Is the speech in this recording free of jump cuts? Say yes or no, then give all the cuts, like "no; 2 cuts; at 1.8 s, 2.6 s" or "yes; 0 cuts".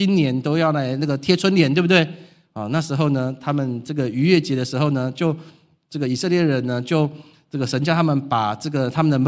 yes; 0 cuts